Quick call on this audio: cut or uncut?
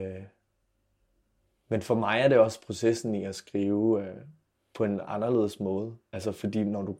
uncut